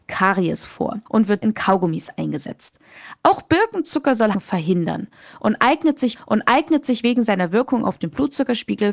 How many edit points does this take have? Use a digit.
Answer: 4